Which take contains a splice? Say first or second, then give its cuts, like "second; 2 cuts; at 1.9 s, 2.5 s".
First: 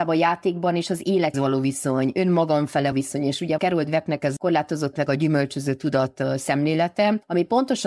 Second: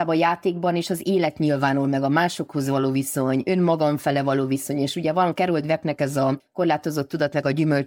first; 5 cuts; at 1.3 s, 2.9 s, 3.6 s, 4.4 s, 4.9 s